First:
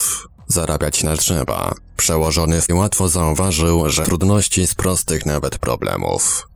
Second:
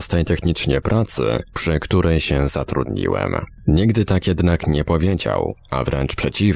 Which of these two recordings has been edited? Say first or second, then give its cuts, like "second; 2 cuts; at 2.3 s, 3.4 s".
first; 4 cuts; at 1.2 s, 2.7 s, 4.0 s, 4.8 s